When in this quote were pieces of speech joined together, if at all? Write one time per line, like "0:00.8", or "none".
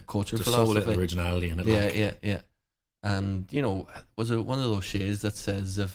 none